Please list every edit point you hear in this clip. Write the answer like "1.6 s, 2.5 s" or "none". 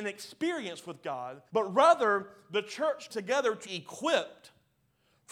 1.5 s, 3.1 s, 3.6 s